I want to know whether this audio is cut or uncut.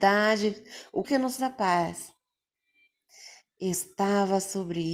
cut